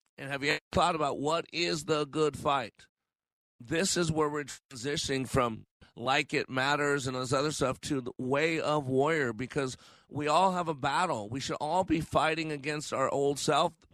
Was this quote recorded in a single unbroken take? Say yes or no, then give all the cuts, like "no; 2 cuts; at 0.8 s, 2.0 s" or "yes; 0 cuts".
yes; 0 cuts